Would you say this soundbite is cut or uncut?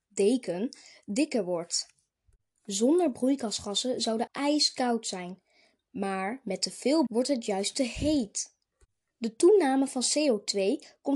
cut